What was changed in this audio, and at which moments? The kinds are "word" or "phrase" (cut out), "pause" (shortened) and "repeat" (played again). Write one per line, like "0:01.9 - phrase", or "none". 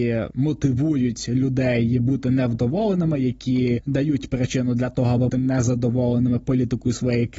0:05.3 - word